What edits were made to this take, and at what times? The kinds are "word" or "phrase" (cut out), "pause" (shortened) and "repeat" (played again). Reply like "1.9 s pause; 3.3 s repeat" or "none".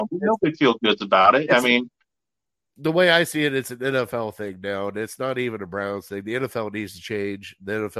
none